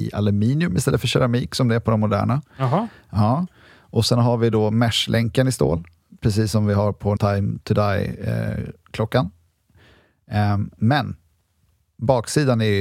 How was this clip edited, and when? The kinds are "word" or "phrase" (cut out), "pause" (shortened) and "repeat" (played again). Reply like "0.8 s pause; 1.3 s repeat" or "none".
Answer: 7.2 s word